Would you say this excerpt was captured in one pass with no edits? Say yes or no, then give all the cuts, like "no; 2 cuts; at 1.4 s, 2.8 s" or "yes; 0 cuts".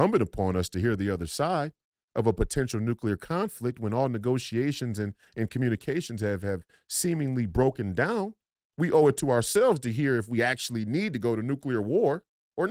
yes; 0 cuts